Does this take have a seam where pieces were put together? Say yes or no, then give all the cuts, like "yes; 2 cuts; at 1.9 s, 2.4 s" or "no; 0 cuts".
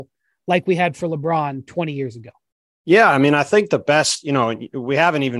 no; 0 cuts